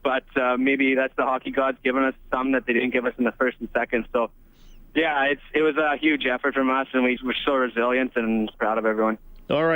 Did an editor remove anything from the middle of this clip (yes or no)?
yes